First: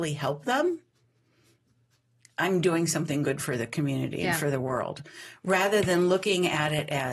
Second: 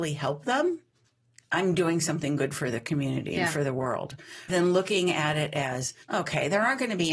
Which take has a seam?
second; 3 cuts; at 1.0 s, 4.5 s, 6.0 s

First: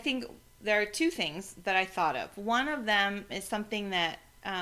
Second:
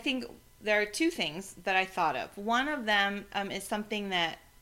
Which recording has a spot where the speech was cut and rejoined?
first; 1 cut; at 3.3 s

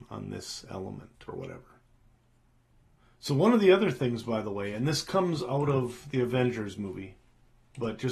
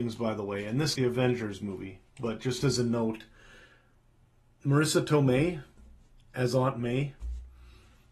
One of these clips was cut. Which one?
second; 2 cuts; at 0.9 s, 2.1 s

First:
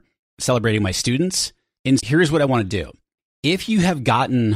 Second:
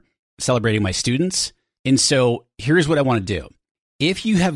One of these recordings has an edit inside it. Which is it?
first; 1 cut; at 2.0 s

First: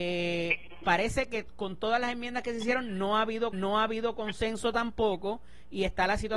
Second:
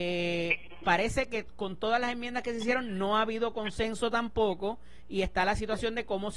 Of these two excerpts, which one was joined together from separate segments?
first; 1 cut; at 3.5 s

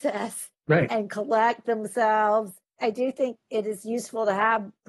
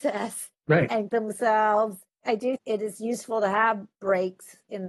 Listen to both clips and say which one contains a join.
second; 2 cuts; at 1.1 s, 2.6 s

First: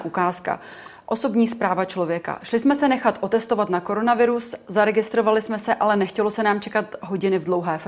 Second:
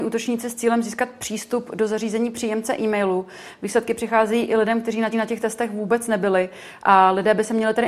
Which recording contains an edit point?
second; 1 cut; at 5.1 s

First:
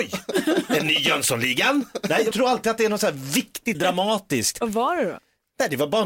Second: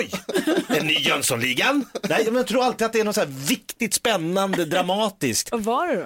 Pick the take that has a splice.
first; 2 cuts; at 2.3 s, 3.7 s

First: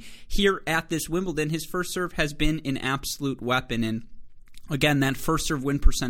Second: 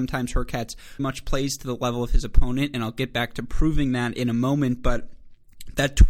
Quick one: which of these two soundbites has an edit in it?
second; 1 cut; at 1.0 s

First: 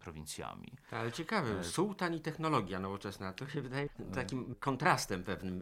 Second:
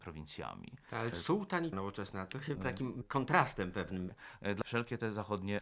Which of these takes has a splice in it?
second; 4 cuts; at 1.1 s, 1.7 s, 2.6 s, 4.6 s

